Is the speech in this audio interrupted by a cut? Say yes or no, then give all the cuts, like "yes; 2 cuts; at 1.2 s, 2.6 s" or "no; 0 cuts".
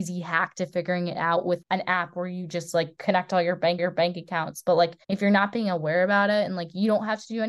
yes; 3 cuts; at 1.6 s, 3.8 s, 5.0 s